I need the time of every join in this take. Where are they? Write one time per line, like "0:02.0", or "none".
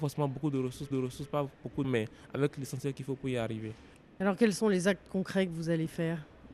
0:00.9
0:01.8